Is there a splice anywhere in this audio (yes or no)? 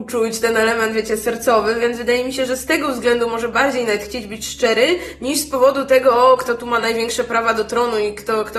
no